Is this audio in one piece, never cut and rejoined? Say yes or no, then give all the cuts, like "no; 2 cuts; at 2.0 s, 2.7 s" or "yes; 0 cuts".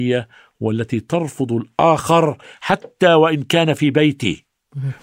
yes; 0 cuts